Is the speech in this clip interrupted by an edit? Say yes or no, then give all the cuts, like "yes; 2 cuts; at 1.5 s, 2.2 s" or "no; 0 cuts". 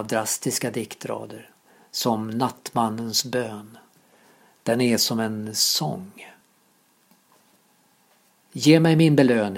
no; 0 cuts